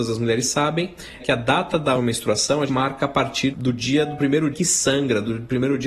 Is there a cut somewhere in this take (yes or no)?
yes